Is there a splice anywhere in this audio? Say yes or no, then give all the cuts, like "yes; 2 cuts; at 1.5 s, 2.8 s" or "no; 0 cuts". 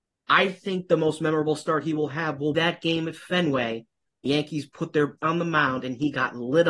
yes; 3 cuts; at 2.5 s, 4.3 s, 5.2 s